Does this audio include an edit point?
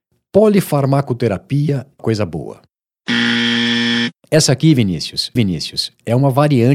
yes; 3 cuts; at 2.0 s, 4.2 s, 5.4 s

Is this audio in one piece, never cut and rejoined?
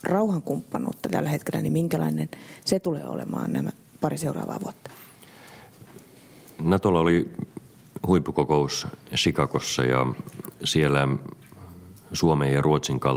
yes; 0 cuts

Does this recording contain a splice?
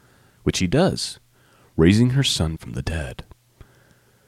yes; 1 cut; at 2.6 s

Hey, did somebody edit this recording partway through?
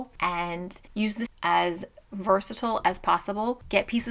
yes; 1 cut; at 1.3 s

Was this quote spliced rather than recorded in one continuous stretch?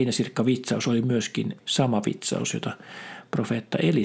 yes; 1 cut; at 1.6 s

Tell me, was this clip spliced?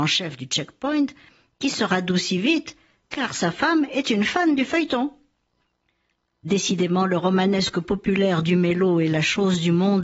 no; 0 cuts

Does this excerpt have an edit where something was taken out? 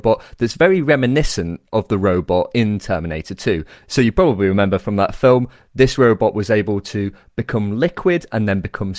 no; 0 cuts

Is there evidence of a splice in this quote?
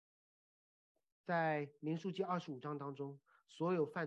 no; 0 cuts

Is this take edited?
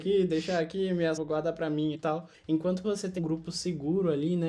yes; 4 cuts; at 1.2 s, 1.9 s, 2.8 s, 3.2 s

